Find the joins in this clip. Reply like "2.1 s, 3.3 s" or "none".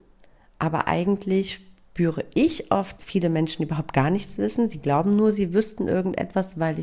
3.0 s